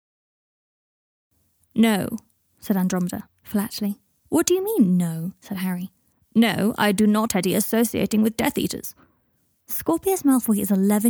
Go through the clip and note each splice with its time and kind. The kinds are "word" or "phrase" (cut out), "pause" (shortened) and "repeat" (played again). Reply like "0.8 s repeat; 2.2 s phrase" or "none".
4.1 s pause; 7.3 s word